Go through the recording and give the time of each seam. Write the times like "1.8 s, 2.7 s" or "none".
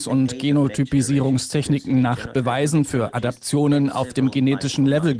none